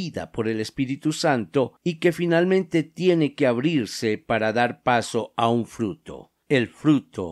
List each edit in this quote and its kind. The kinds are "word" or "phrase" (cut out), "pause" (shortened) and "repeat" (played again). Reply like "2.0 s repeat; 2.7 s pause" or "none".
1.8 s pause